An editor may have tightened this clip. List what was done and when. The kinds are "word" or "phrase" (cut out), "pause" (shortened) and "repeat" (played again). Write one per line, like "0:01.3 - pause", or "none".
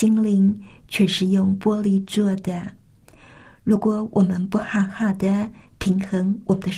none